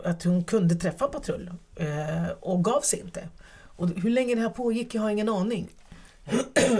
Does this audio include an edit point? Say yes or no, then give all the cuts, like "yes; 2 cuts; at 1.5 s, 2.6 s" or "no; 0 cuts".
no; 0 cuts